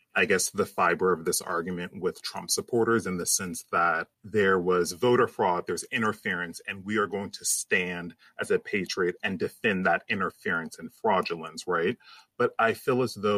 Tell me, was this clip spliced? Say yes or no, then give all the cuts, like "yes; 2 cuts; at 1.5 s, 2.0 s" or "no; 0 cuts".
yes; 1 cut; at 4.1 s